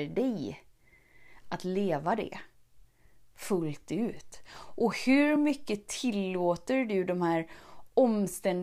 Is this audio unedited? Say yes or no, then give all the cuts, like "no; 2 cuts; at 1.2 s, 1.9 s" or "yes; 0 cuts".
yes; 0 cuts